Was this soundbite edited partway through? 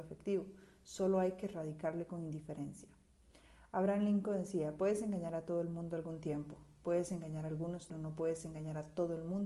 yes; 1 cut; at 7.9 s

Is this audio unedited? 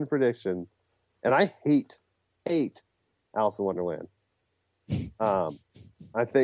yes; 0 cuts

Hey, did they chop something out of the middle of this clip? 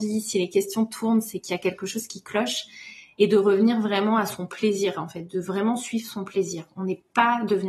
no; 0 cuts

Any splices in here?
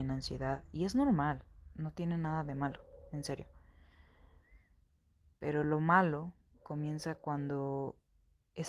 no; 0 cuts

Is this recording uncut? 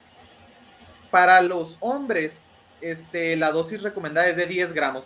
yes; 0 cuts

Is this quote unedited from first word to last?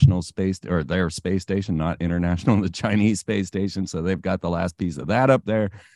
yes; 0 cuts

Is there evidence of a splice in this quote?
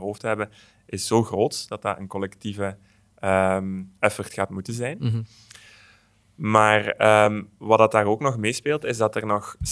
no; 0 cuts

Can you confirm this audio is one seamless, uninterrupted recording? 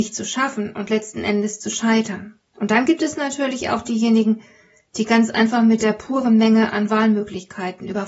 no; 1 cut; at 2.5 s

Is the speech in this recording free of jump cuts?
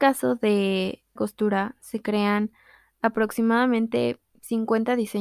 no; 1 cut; at 1.2 s

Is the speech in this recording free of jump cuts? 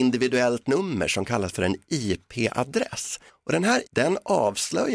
no; 2 cuts; at 3.3 s, 3.9 s

